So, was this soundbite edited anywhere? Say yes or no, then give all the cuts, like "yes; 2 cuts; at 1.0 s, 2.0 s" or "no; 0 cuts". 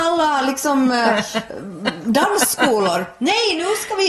no; 0 cuts